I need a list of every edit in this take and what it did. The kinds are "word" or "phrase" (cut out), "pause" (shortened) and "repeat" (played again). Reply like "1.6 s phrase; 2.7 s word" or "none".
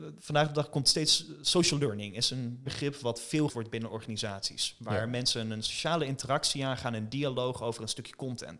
2.7 s word; 3.5 s word